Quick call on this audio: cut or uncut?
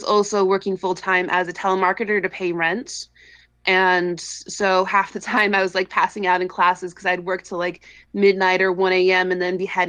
uncut